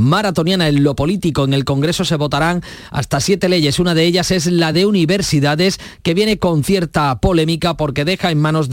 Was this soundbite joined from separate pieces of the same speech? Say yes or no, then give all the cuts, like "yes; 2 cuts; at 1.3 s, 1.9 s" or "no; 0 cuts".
no; 0 cuts